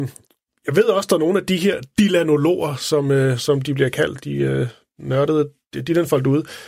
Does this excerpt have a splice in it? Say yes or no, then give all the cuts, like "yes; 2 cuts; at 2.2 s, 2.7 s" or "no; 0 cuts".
no; 0 cuts